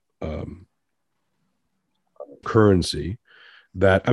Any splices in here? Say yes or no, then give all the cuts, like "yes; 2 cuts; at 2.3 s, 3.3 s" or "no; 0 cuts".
yes; 1 cut; at 2.4 s